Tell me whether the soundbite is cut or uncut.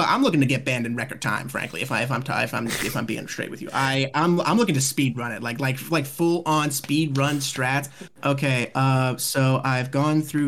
uncut